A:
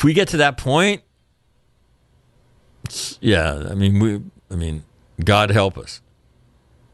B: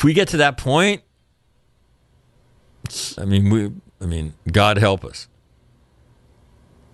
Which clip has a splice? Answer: B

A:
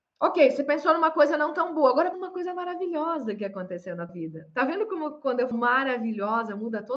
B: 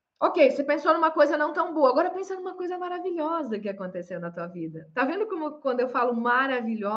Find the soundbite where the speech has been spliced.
A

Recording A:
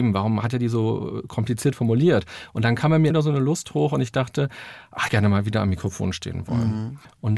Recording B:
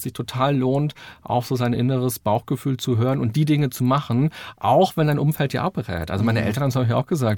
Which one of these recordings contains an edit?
A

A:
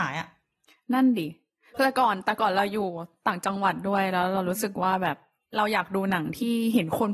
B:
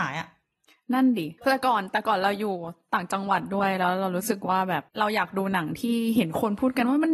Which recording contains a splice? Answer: B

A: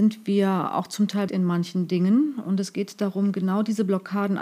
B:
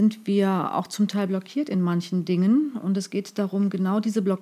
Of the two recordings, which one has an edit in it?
A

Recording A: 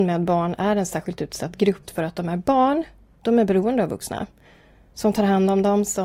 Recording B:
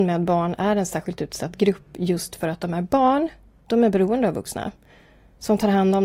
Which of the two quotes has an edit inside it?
A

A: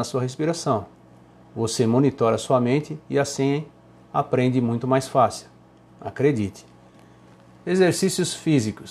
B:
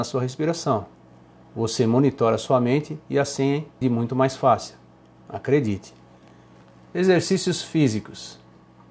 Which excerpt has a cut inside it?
B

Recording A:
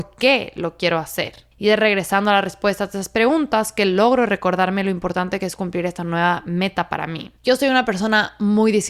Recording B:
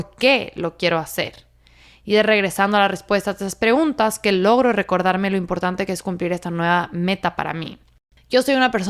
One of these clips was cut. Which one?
A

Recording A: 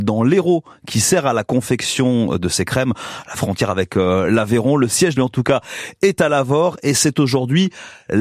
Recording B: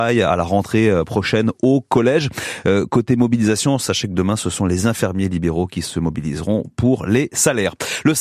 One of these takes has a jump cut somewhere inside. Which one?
A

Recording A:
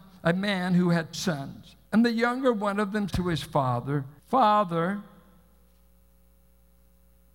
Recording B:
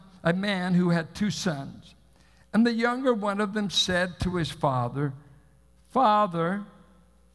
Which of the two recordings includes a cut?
A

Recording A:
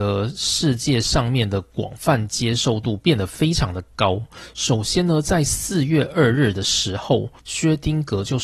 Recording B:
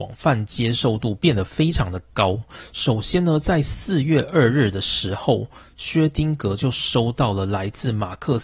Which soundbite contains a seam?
A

